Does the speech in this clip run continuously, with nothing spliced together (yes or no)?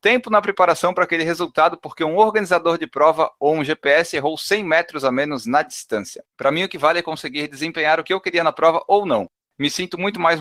no